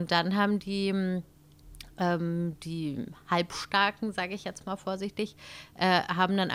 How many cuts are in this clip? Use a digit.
0